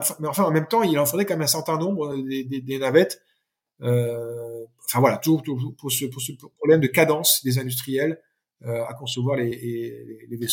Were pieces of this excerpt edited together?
no; 0 cuts

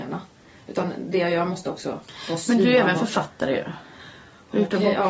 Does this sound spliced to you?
no; 0 cuts

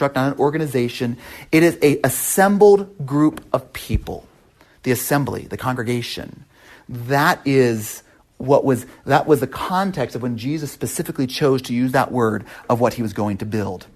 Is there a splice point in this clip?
no; 0 cuts

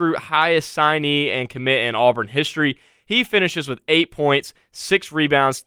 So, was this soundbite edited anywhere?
no; 0 cuts

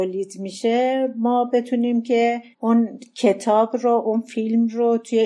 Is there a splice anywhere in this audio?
yes; 1 cut; at 2.5 s

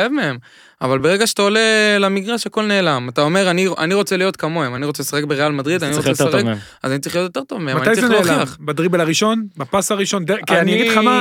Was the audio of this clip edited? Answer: no; 0 cuts

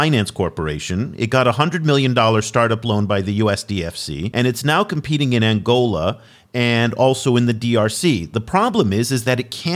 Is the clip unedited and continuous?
yes; 0 cuts

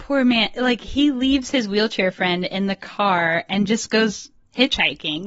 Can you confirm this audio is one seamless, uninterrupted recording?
yes; 0 cuts

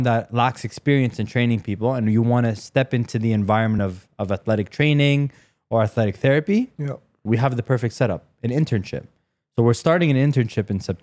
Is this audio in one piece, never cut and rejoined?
yes; 0 cuts

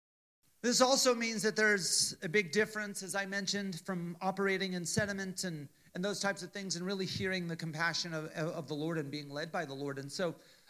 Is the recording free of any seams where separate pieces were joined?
yes; 0 cuts

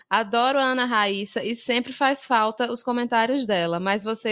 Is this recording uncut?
yes; 0 cuts

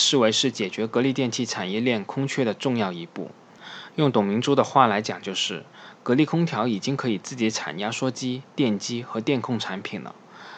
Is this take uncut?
no; 1 cut; at 8.5 s

